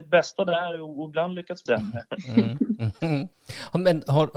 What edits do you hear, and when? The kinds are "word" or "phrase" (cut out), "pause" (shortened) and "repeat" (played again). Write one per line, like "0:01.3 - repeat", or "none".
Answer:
0:01.7 - phrase
0:03.3 - pause